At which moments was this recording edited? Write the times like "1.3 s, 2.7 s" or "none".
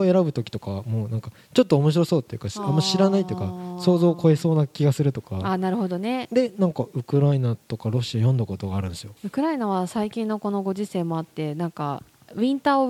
9.2 s